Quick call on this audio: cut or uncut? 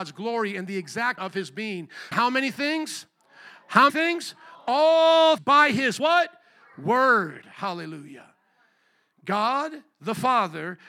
cut